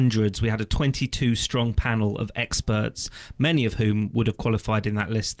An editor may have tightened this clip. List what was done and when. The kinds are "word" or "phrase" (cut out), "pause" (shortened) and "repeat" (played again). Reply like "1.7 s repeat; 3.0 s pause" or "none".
none